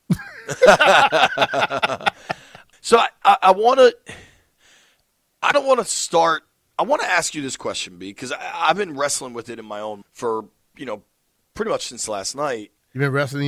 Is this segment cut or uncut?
cut